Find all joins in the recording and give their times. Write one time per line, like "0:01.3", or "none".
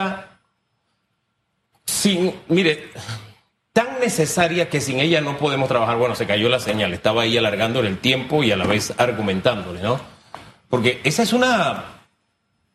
none